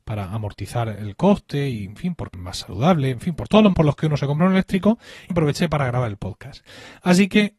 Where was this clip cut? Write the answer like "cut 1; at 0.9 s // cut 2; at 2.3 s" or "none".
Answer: cut 1; at 2.3 s // cut 2; at 3.7 s // cut 3; at 5.3 s

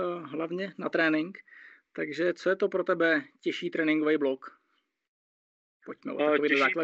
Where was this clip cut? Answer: none

